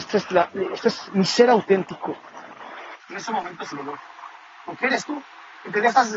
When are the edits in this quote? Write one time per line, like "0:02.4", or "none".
0:03.0
0:03.7
0:04.5